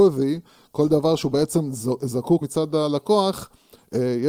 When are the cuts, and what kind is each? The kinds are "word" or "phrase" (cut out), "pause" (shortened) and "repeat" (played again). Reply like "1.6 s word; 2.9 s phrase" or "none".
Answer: 2.4 s word